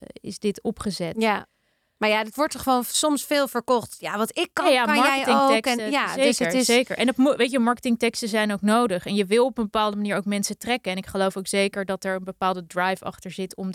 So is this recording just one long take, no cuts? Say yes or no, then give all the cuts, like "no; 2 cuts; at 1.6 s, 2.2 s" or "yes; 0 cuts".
yes; 0 cuts